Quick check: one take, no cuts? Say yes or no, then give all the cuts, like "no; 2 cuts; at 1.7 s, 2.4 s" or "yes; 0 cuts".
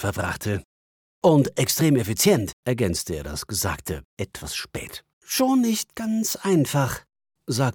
no; 2 cuts; at 2.6 s, 5.1 s